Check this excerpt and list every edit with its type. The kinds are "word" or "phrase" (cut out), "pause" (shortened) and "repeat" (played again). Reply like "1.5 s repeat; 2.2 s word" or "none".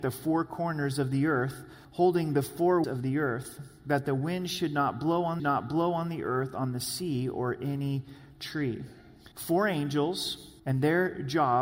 1.8 s pause; 2.8 s word; 5.4 s repeat; 9.3 s pause; 10.6 s pause